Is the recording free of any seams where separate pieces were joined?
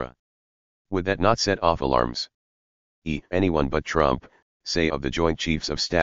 no; 2 cuts; at 3.3 s, 4.9 s

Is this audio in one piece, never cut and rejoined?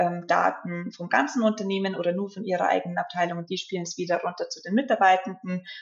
yes; 0 cuts

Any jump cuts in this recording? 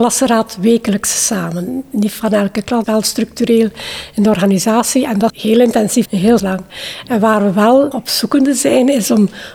yes; 5 cuts; at 2.8 s, 5.3 s, 6.0 s, 6.4 s, 7.9 s

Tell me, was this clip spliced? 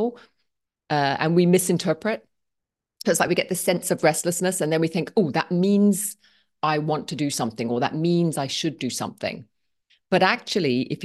no; 0 cuts

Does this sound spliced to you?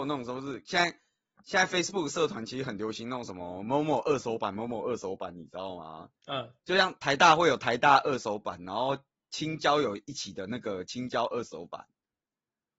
yes; 2 cuts; at 6.2 s, 6.6 s

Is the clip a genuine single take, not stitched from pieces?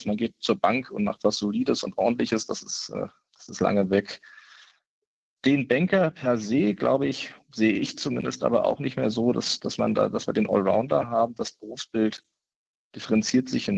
yes; 0 cuts

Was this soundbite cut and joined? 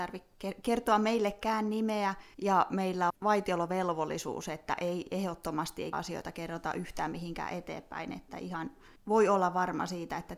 yes; 4 cuts; at 2.3 s, 3.1 s, 5.9 s, 9.0 s

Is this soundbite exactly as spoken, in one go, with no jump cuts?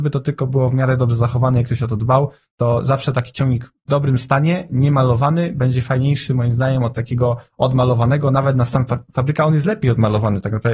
yes; 0 cuts

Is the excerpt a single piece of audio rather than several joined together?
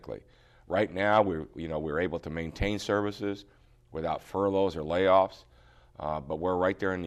yes; 0 cuts

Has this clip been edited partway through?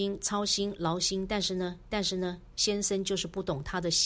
yes; 1 cut; at 1.9 s

